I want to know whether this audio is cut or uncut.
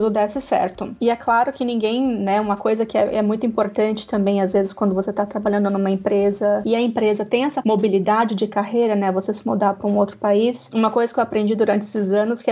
uncut